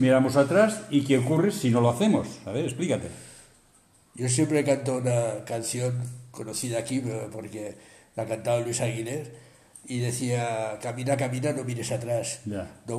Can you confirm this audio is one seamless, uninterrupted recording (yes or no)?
yes